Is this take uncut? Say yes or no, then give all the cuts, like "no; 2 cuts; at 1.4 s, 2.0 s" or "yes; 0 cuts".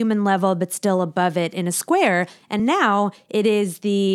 yes; 0 cuts